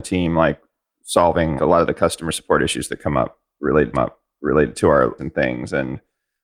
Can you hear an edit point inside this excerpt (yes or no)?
yes